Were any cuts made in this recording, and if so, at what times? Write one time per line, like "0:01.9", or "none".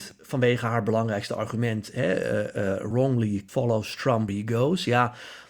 0:02.9
0:03.5
0:04.3